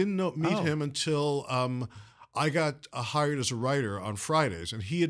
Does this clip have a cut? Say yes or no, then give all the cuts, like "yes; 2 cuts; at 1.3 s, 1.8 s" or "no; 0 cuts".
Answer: no; 0 cuts